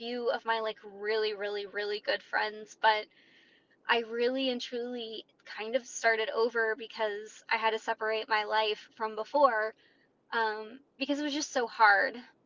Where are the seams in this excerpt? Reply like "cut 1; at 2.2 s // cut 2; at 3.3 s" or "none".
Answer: none